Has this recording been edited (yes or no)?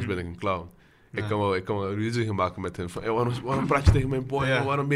no